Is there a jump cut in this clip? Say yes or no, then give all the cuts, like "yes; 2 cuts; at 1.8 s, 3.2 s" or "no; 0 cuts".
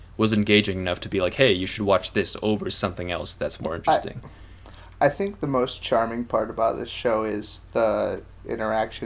no; 0 cuts